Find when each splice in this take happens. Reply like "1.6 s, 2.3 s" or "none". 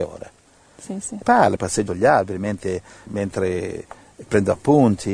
1.2 s, 1.6 s, 1.9 s, 3.1 s